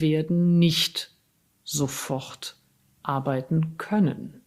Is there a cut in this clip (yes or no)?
no